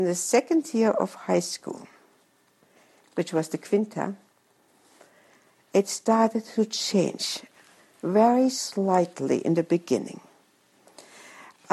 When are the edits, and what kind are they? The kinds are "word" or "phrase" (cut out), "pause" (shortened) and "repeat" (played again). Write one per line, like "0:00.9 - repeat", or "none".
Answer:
none